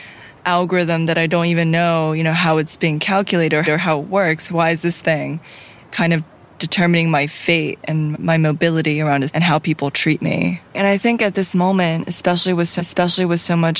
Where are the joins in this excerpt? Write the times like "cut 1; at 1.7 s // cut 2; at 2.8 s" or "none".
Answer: cut 1; at 3.6 s // cut 2; at 8.1 s // cut 3; at 9.3 s // cut 4; at 12.8 s